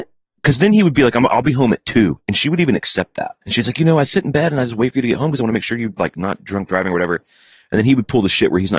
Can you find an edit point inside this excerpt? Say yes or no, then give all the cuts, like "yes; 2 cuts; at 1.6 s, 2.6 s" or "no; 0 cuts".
yes; 1 cut; at 3.4 s